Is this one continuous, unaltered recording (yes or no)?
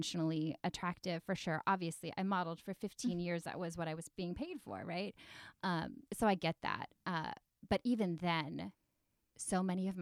no